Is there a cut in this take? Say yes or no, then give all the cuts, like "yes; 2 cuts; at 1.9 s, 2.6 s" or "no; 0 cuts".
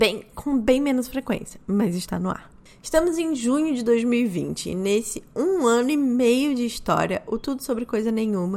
no; 0 cuts